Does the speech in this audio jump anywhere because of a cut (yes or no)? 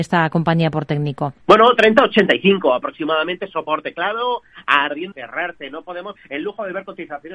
yes